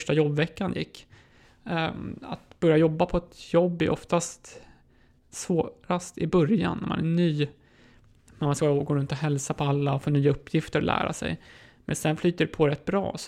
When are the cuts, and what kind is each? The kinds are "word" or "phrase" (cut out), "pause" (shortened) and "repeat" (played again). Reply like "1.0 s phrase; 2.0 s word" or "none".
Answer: none